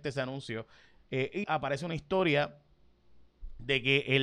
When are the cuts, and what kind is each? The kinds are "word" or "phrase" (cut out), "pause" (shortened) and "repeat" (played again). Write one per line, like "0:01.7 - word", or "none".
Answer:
0:01.4 - word